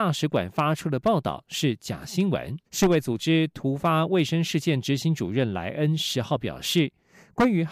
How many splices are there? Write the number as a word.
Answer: one